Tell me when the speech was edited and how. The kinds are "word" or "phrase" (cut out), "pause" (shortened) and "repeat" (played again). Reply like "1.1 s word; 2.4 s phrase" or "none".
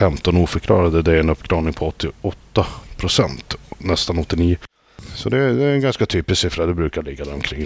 none